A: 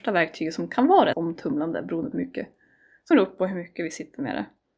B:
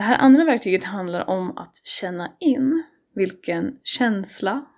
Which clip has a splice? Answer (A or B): A